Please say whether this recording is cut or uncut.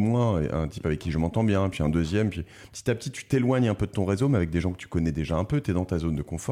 uncut